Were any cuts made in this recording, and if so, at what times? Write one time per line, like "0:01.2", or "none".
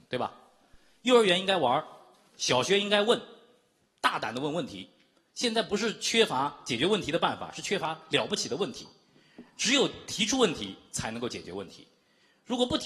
none